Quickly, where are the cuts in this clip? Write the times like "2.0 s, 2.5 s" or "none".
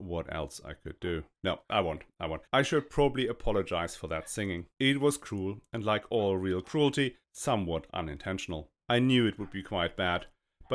1.3 s, 2.5 s, 4.7 s, 7.2 s, 8.8 s